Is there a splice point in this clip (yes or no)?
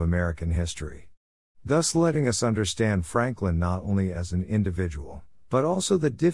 no